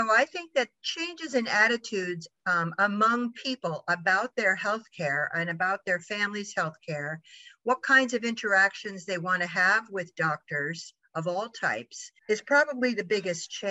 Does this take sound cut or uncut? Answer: cut